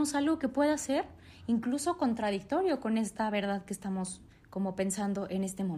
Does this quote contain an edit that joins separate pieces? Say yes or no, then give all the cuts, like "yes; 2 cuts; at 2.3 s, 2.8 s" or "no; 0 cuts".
no; 0 cuts